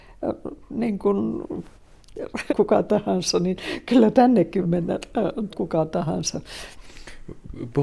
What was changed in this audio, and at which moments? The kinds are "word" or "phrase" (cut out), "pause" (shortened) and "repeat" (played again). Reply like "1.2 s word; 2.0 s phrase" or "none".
2.5 s phrase; 4.6 s word; 5.5 s word